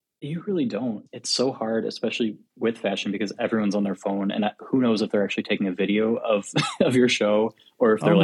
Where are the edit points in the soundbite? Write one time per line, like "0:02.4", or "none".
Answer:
none